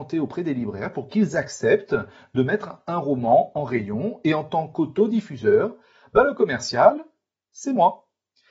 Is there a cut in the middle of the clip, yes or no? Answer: no